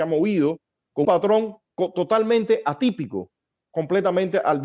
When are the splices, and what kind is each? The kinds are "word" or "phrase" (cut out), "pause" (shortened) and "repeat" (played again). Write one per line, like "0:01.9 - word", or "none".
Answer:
0:01.0 - word
0:03.7 - word